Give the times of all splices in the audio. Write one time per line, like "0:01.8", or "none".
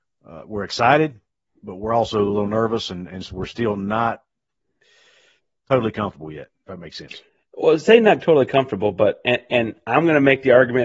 0:07.3